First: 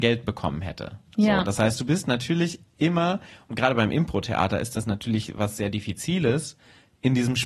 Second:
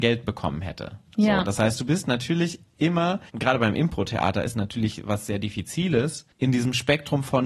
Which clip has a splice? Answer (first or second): second